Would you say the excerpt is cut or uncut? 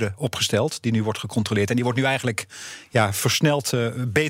uncut